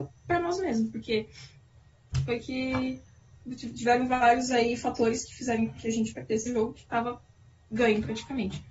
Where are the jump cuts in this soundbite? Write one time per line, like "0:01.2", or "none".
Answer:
0:06.5